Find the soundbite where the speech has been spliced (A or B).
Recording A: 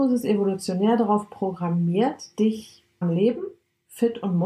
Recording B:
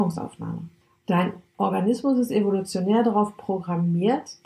A